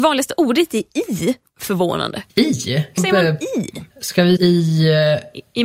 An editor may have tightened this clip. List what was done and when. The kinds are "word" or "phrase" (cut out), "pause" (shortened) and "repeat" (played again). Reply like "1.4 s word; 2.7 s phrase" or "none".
1.5 s phrase; 2.3 s pause; 3.0 s word; 3.9 s pause; 4.4 s word